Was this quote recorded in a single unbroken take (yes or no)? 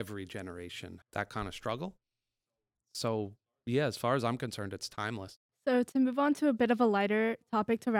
no